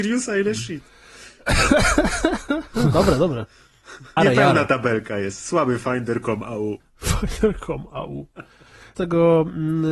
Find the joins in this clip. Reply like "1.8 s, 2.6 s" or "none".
4.2 s, 6.8 s, 8.9 s